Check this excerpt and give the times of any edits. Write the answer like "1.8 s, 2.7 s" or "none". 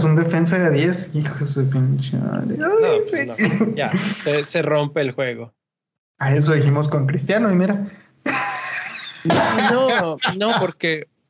none